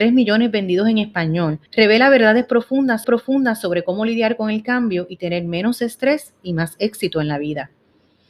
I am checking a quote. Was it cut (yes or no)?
yes